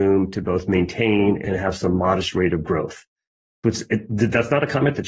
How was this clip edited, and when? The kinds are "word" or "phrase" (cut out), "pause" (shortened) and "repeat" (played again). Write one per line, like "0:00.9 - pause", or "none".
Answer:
none